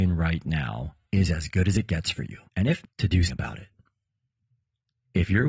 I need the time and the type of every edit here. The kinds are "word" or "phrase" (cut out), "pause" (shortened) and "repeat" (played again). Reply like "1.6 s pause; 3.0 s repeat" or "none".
1.0 s pause; 2.4 s pause; 2.8 s word; 3.3 s word